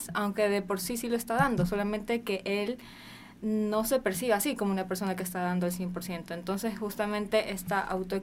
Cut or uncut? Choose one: uncut